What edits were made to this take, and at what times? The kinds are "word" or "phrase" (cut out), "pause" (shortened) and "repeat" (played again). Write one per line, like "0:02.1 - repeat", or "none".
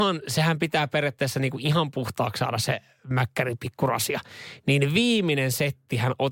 none